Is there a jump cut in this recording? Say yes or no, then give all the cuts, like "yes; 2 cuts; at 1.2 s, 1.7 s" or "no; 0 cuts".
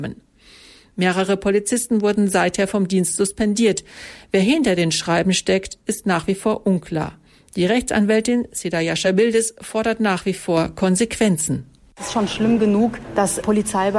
no; 0 cuts